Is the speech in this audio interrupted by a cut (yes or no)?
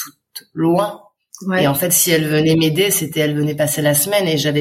no